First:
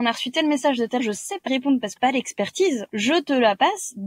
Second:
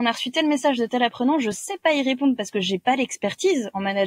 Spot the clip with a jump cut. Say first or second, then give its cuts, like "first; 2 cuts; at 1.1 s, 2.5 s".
first; 4 cuts; at 1.0 s, 1.5 s, 2.0 s, 2.9 s